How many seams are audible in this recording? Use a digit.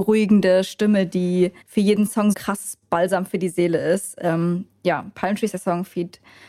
3